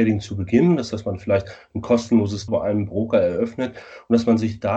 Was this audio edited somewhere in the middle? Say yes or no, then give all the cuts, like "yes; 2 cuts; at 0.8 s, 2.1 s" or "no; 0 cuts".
yes; 2 cuts; at 0.9 s, 2.5 s